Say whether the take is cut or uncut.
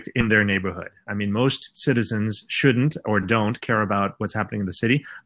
uncut